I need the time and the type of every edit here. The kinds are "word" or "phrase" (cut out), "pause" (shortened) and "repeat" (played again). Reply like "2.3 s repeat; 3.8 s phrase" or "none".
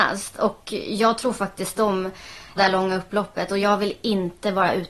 2.6 s phrase